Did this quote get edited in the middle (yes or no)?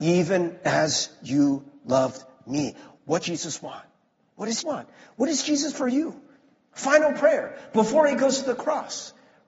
yes